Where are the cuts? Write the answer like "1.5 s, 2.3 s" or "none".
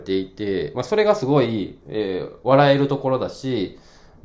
1.8 s